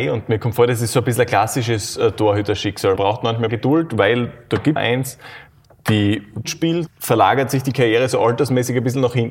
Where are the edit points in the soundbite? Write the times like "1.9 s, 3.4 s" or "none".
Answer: 3.0 s, 3.5 s, 4.8 s, 6.4 s, 6.9 s